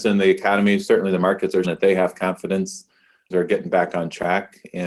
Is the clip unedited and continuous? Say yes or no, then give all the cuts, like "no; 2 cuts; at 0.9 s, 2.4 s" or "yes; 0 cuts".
no; 2 cuts; at 1.6 s, 3.3 s